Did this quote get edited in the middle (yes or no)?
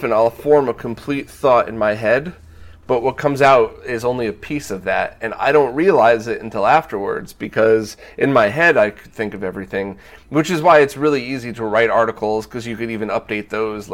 no